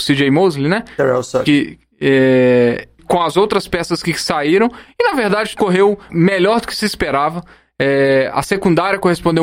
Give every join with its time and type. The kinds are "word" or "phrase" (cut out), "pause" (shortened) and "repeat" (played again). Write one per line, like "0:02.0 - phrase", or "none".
0:03.0 - word
0:05.5 - word
0:06.1 - word